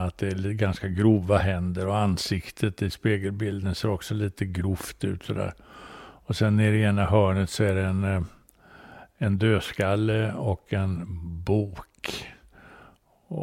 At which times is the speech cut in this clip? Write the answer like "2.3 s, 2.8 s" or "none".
none